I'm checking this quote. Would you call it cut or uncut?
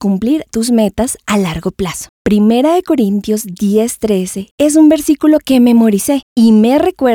cut